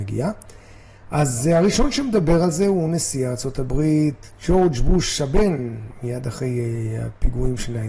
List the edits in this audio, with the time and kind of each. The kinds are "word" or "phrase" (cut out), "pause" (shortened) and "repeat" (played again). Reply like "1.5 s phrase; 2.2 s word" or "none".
none